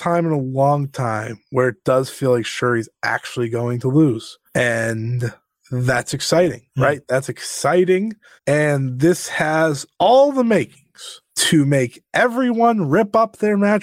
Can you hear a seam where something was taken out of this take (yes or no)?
yes